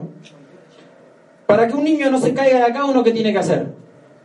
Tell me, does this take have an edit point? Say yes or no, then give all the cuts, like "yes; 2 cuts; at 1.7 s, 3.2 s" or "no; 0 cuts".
no; 0 cuts